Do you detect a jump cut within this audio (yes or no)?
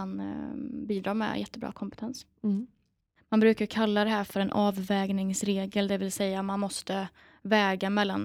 no